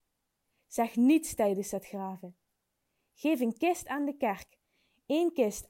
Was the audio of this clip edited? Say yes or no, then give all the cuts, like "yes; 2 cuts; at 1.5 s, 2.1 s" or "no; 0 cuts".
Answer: no; 0 cuts